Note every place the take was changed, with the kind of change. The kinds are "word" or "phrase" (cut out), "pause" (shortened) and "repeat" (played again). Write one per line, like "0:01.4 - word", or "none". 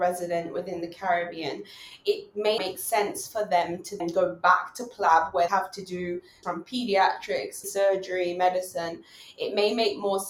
0:02.6 - word
0:04.0 - word
0:05.5 - word
0:06.4 - word
0:07.6 - word

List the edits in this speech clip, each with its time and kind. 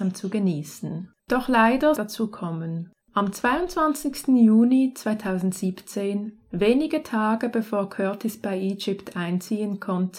0:01.2 - pause
0:02.0 - phrase
0:03.0 - pause

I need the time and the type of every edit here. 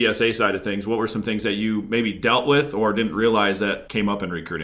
none

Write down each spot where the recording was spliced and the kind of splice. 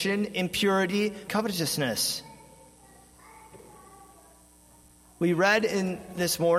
0:01.3 - phrase

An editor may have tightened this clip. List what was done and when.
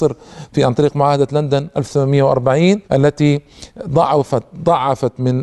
0:02.8 - pause

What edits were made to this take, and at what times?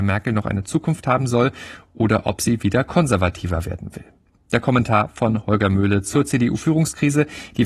none

